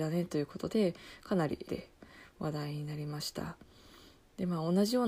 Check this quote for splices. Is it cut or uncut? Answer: cut